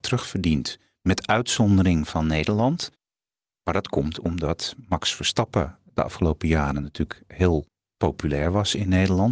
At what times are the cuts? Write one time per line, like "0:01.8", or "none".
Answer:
none